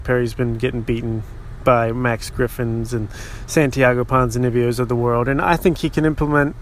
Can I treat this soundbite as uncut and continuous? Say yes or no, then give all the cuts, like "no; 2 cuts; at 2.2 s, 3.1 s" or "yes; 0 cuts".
yes; 0 cuts